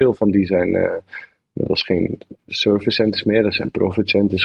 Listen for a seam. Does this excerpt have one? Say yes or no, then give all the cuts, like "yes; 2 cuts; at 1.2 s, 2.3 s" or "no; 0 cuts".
no; 0 cuts